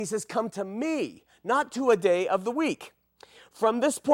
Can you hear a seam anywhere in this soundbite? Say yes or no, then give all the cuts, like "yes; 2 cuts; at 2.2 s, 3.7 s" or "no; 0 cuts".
no; 0 cuts